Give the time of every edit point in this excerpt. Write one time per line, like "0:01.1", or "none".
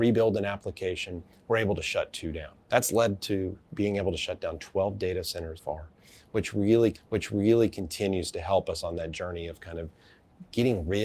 0:02.6
0:05.6
0:06.9

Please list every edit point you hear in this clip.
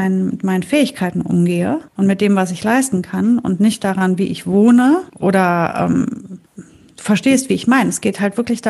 0:01.9
0:05.1
0:06.5

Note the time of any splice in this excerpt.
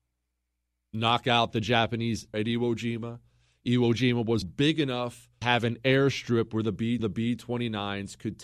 0:02.3
0:04.4
0:05.4
0:07.0

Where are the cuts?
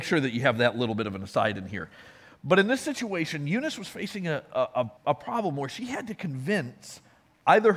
0:05.0

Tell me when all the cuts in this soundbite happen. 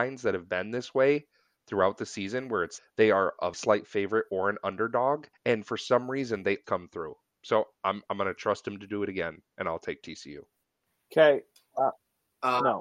0:02.8
0:03.5
0:05.3
0:06.6

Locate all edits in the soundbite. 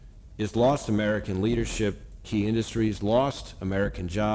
0:02.2

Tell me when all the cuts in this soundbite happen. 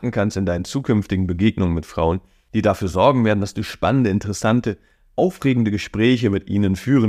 none

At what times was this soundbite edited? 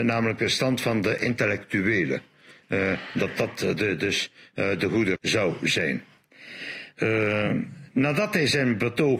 0:05.2

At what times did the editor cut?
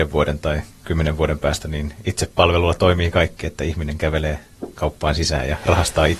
none

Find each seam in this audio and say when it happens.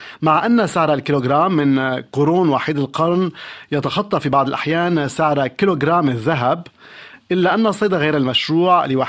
none

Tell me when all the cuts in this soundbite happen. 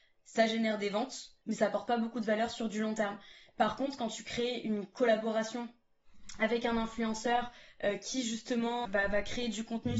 0:01.4
0:08.8

